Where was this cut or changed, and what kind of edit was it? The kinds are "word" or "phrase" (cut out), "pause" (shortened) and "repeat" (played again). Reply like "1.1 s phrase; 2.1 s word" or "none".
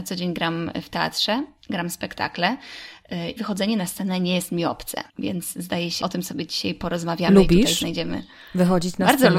3.4 s word; 5.1 s pause; 6.0 s word